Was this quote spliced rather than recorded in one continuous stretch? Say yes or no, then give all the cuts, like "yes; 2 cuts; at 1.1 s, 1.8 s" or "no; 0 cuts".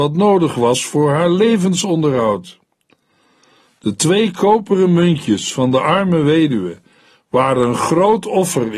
no; 0 cuts